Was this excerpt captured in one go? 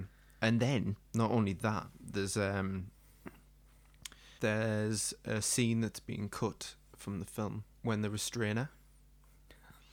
no; 2 cuts; at 4.4 s, 7.7 s

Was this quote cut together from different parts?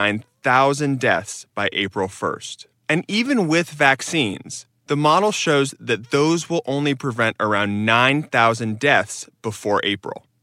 no; 0 cuts

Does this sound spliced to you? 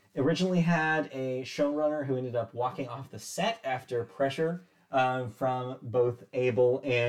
no; 0 cuts

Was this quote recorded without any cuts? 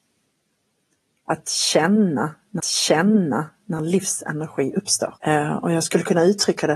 no; 2 cuts; at 2.6 s, 5.2 s

